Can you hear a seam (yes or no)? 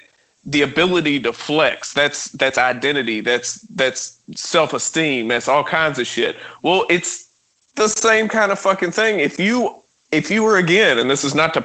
yes